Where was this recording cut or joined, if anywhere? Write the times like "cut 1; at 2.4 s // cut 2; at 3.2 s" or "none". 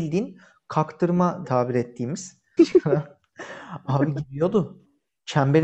cut 1; at 1.4 s // cut 2; at 2.6 s